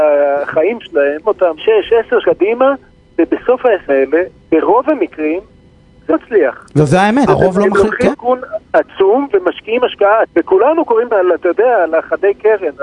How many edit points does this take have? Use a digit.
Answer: 9